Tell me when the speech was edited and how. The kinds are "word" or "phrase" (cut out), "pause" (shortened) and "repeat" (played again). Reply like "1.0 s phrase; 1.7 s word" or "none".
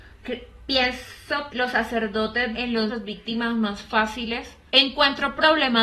1.5 s word; 2.5 s word; 2.9 s word; 4.7 s word